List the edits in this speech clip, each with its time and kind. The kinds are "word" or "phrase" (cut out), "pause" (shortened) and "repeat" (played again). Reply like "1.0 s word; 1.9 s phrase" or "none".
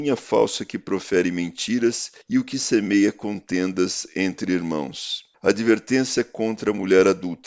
2.2 s pause; 5.3 s pause